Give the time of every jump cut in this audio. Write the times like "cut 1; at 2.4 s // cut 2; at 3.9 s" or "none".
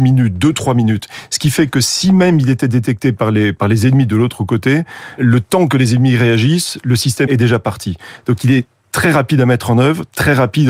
cut 1; at 5.2 s // cut 2; at 7.3 s